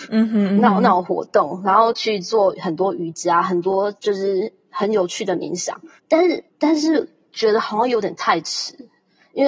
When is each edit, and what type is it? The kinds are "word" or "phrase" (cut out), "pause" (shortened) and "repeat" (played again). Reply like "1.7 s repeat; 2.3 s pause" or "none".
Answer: 4.0 s pause; 6.0 s pause; 6.5 s pause